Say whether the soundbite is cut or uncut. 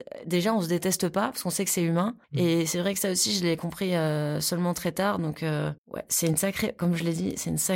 cut